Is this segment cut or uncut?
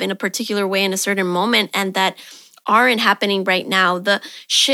uncut